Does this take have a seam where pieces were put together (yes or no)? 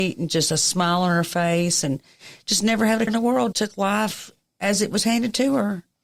yes